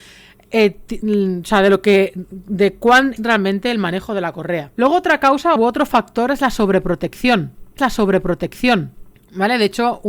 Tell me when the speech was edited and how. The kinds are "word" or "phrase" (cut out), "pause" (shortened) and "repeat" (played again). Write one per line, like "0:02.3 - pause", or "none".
0:03.2 - phrase
0:04.7 - pause
0:05.6 - word
0:07.8 - repeat